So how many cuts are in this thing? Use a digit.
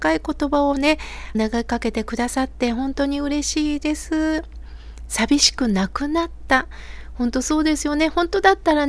1